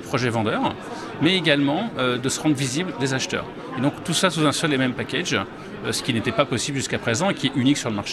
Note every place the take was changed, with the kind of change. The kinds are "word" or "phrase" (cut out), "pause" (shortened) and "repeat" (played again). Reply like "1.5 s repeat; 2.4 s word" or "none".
none